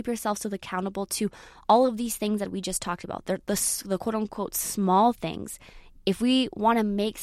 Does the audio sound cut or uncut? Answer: uncut